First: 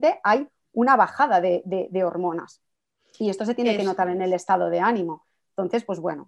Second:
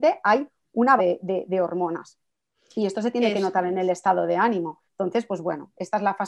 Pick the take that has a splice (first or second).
second